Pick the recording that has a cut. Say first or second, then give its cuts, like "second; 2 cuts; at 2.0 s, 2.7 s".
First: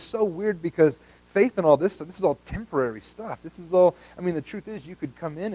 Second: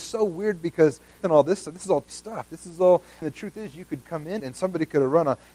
second; 4 cuts; at 1.2 s, 2.1 s, 3.2 s, 4.4 s